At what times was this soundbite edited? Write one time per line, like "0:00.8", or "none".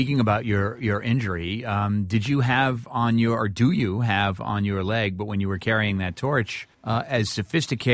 0:06.7